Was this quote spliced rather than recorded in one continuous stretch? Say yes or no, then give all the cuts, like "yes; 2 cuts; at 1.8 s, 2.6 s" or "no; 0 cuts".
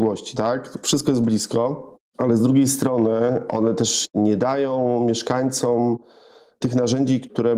no; 0 cuts